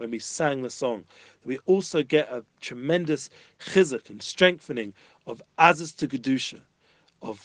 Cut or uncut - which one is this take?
uncut